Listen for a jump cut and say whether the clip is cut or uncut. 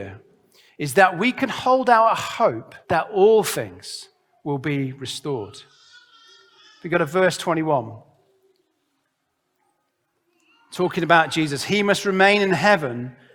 cut